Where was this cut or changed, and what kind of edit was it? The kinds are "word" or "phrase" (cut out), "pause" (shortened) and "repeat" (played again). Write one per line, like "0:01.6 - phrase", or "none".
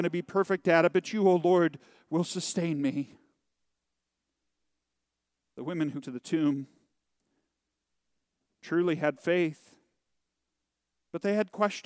0:06.0 - word